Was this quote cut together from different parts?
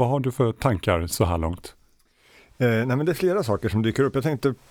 no; 0 cuts

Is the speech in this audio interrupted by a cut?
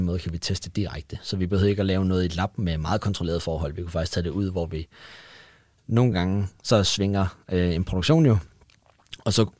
no; 0 cuts

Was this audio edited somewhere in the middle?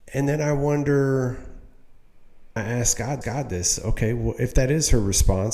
yes; 2 cuts; at 2.6 s, 3.2 s

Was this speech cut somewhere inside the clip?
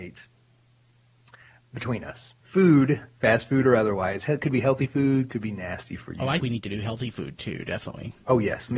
yes; 2 cuts; at 2.4 s, 6.4 s

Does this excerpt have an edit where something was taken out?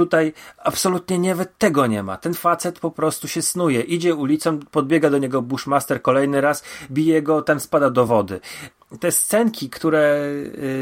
no; 0 cuts

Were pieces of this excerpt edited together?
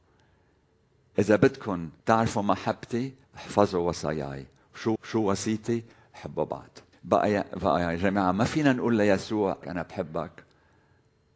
yes; 5 cuts; at 2.0 s, 3.2 s, 5.0 s, 6.9 s, 9.6 s

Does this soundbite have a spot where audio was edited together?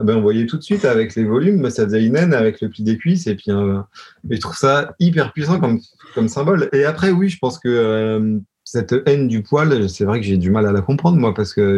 no; 0 cuts

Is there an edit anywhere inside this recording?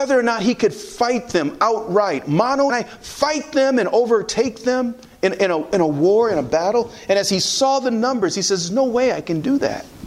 yes; 1 cut; at 2.7 s

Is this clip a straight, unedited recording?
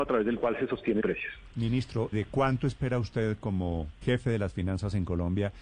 no; 3 cuts; at 1.0 s, 2.1 s, 4.0 s

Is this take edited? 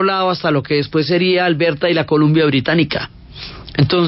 no; 0 cuts

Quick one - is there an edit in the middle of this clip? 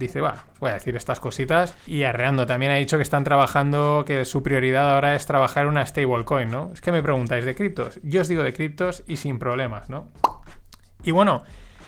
yes; 1 cut; at 1.9 s

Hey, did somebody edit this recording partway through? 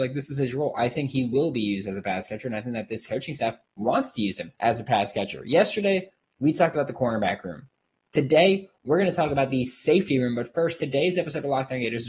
yes; 1 cut; at 4.6 s

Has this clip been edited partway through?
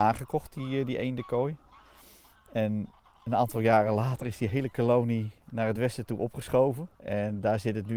no; 0 cuts

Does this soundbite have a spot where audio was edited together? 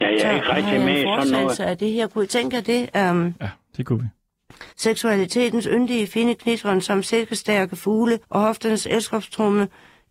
yes; 2 cuts; at 4.7 s, 8.2 s

